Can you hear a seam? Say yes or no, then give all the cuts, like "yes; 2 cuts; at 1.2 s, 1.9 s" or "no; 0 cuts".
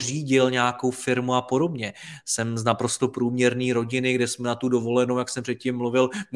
no; 0 cuts